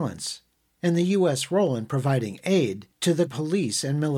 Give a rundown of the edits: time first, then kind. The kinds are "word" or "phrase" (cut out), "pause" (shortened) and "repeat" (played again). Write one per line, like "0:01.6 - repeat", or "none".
0:02.9 - pause
0:03.3 - word